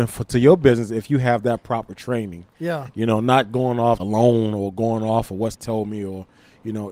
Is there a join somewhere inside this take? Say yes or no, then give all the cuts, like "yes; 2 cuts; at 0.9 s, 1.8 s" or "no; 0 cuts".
yes; 2 cuts; at 4.0 s, 5.5 s